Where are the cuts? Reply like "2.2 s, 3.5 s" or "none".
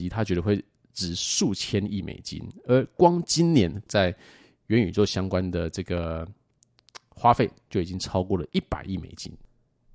3.9 s